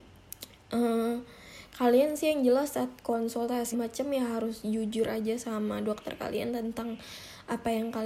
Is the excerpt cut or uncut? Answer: cut